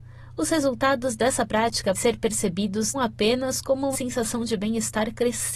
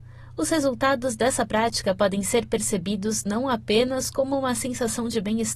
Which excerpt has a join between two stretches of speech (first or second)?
first